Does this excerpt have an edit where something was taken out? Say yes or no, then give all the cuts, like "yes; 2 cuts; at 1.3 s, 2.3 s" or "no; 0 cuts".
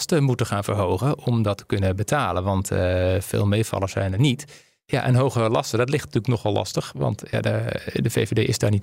no; 0 cuts